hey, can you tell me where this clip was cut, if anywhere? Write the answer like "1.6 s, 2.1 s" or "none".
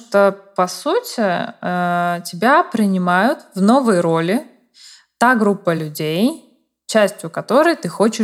none